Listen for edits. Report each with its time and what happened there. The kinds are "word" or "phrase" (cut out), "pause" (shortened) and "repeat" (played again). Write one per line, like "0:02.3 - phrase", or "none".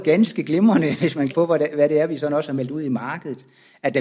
0:01.3 - word